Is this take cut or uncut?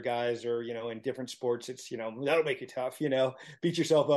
uncut